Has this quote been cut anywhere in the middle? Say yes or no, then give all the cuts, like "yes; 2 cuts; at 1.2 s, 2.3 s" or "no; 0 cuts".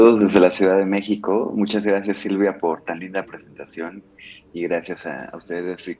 no; 0 cuts